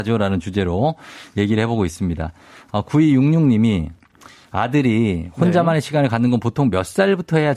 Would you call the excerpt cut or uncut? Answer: uncut